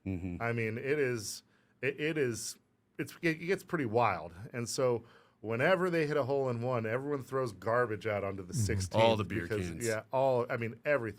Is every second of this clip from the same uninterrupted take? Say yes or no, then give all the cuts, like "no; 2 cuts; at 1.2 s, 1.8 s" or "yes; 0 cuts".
yes; 0 cuts